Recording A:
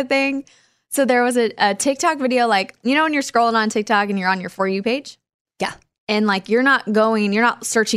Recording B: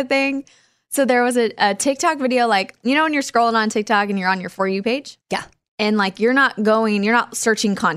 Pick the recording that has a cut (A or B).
B